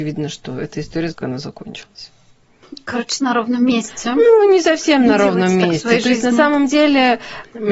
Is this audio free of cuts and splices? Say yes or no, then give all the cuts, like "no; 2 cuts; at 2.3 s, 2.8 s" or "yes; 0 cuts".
no; 2 cuts; at 1.1 s, 3.2 s